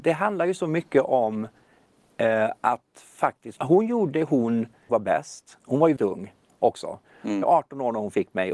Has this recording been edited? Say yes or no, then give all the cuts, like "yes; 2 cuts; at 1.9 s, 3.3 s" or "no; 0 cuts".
yes; 5 cuts; at 3.6 s, 4.1 s, 4.9 s, 6.0 s, 7.4 s